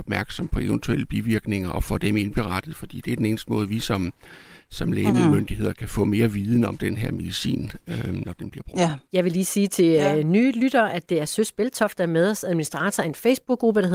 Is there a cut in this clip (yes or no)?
no